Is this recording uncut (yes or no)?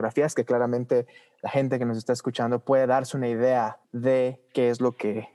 no